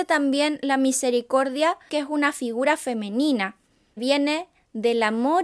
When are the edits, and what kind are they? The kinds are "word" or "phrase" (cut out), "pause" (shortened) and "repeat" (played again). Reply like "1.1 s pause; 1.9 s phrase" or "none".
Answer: 1.9 s word; 4.0 s word